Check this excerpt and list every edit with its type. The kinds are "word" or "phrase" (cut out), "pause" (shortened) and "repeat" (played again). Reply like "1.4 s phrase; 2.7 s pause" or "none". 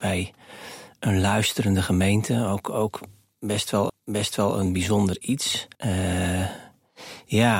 3.9 s repeat; 5.7 s pause